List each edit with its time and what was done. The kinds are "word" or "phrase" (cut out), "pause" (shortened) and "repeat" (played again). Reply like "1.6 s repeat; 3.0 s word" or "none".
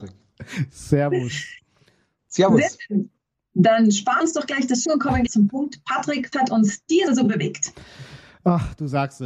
4.2 s word; 4.9 s word; 5.3 s word; 6.3 s word; 7.1 s word

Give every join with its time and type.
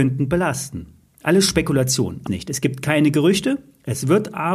2.3 s phrase

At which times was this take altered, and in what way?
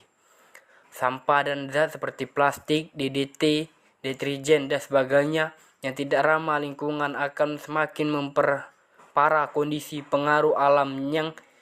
none

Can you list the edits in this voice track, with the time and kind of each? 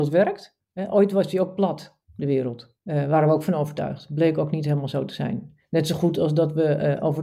2.0 s pause; 2.8 s pause

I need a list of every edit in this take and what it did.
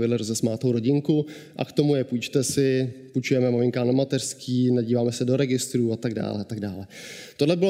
none

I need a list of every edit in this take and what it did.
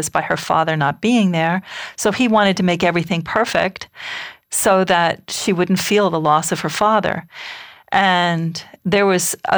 none

